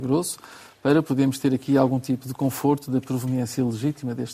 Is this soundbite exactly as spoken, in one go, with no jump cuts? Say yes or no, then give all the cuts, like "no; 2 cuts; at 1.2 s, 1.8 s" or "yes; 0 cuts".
yes; 0 cuts